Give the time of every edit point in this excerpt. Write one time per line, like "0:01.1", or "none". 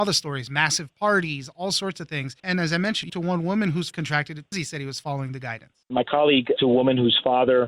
0:02.4
0:03.1
0:03.9
0:04.5
0:05.8
0:06.6